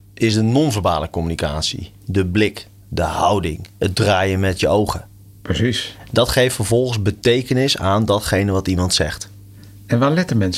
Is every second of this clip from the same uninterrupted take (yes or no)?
no